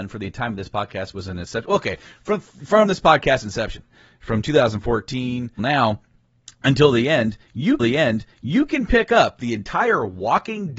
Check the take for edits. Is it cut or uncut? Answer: cut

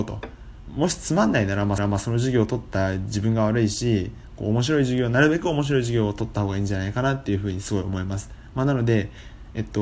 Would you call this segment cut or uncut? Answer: cut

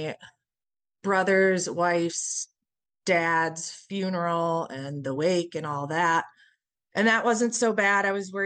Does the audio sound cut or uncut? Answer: uncut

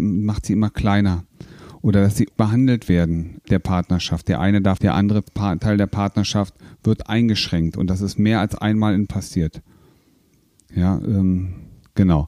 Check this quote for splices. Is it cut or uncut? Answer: cut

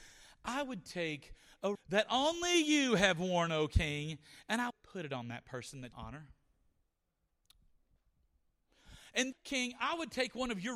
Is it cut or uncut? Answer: cut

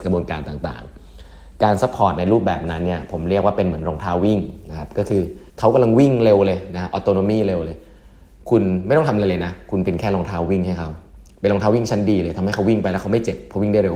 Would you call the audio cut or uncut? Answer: cut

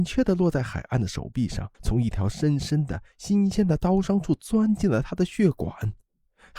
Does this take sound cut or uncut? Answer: cut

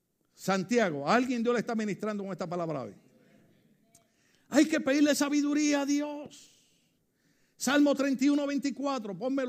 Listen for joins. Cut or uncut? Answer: uncut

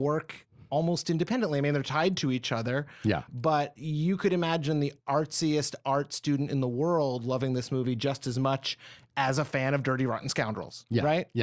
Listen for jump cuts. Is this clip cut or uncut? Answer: uncut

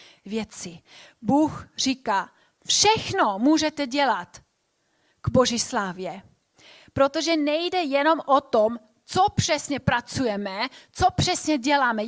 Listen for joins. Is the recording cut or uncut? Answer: uncut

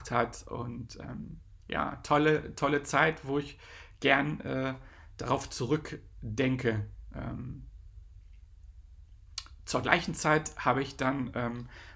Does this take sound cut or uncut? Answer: cut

